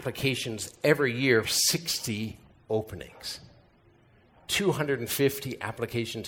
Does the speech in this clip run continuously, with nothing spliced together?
no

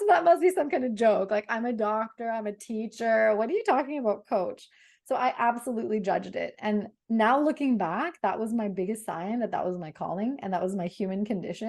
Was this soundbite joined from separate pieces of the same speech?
no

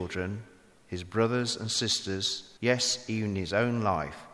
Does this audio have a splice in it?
yes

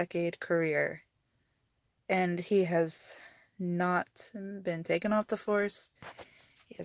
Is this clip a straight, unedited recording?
yes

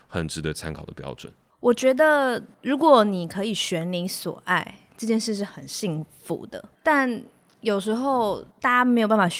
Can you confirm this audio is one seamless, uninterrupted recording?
no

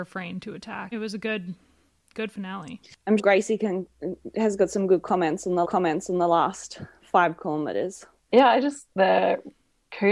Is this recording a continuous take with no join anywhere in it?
no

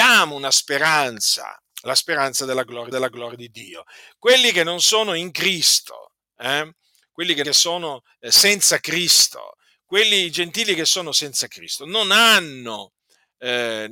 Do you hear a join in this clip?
yes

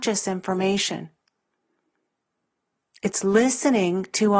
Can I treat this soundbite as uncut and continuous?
yes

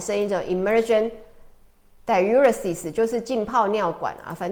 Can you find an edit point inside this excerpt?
no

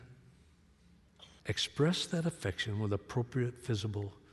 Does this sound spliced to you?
yes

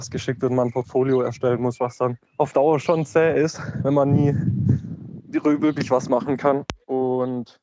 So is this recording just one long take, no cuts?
no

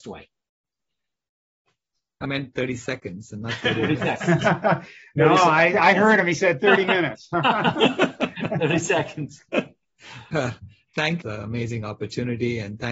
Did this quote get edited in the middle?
yes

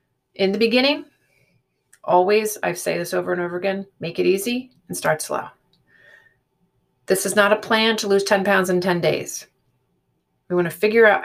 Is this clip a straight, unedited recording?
yes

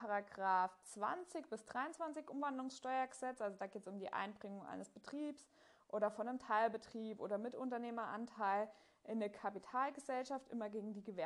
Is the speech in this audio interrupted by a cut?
no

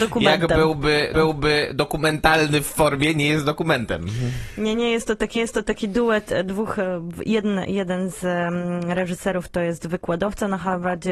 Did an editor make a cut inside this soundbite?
yes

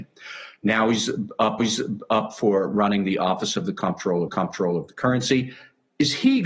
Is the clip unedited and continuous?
no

